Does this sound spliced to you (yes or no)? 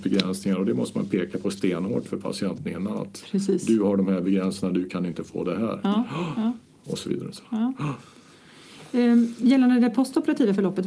no